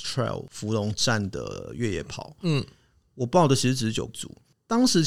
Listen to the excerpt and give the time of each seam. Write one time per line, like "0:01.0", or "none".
0:04.1